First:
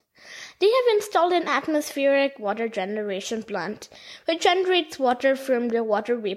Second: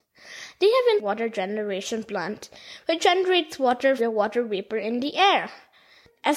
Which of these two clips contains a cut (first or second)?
second